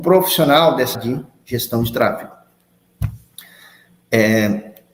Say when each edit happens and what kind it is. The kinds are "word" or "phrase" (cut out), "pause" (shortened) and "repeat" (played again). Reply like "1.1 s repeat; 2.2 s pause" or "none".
0.9 s word